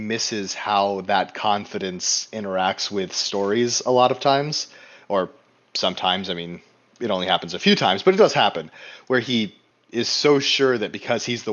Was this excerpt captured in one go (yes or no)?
yes